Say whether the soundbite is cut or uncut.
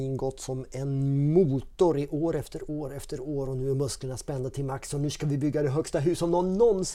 uncut